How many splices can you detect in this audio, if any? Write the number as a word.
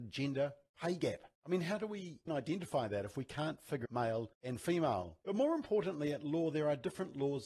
five